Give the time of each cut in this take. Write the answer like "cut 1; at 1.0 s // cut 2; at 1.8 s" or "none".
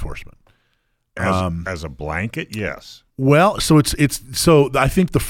cut 1; at 3.1 s